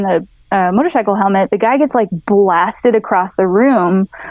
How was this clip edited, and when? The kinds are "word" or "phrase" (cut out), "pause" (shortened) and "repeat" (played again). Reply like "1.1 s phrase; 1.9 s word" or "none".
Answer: none